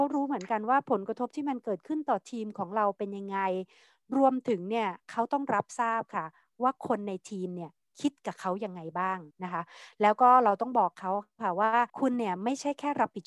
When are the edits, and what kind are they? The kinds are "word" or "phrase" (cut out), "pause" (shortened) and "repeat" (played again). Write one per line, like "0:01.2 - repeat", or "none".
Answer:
0:09.3 - pause
0:11.9 - pause

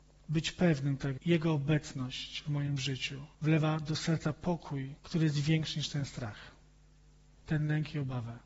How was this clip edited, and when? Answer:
0:01.2 - word
0:03.3 - pause
0:05.0 - pause

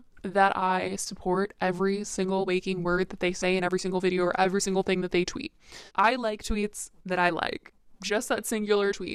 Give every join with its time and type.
0:05.9 - pause

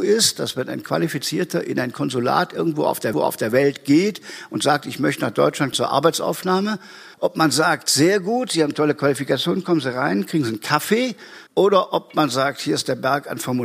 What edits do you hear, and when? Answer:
0:03.1 - repeat
0:05.7 - word
0:07.1 - pause
0:11.5 - pause

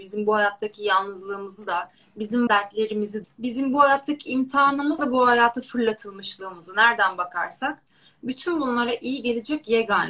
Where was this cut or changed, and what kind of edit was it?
0:02.5 - word
0:03.2 - word
0:05.0 - word

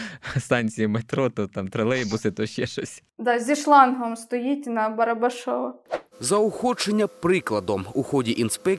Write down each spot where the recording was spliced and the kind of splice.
none

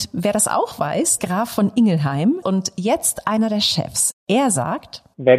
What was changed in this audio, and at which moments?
0:01.2 - phrase
0:02.4 - phrase

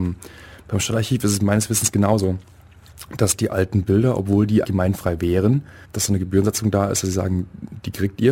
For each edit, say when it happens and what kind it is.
0:04.6 - word
0:05.8 - word

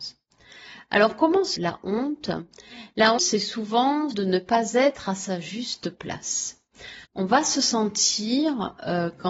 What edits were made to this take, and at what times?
0:01.5 - word
0:03.2 - word
0:04.1 - phrase
0:07.0 - pause

